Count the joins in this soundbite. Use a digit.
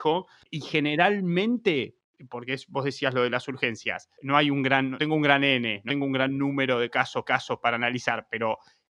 3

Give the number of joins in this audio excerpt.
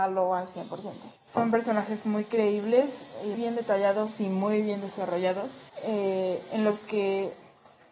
3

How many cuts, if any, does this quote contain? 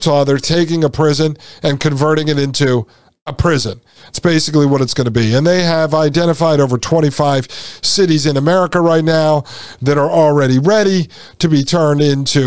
0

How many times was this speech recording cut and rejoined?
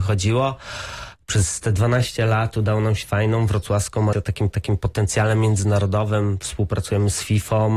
3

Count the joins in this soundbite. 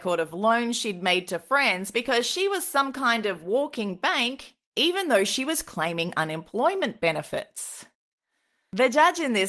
0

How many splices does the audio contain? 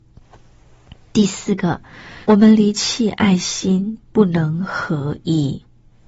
1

